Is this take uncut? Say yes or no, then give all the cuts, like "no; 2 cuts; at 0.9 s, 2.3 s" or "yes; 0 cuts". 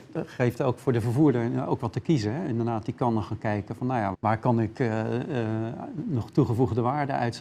no; 1 cut; at 4.1 s